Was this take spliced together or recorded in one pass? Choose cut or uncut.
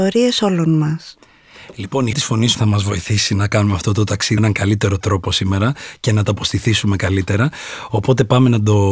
cut